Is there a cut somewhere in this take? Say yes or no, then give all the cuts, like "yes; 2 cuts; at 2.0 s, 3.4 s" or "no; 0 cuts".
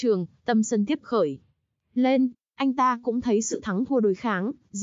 yes; 1 cut; at 1.0 s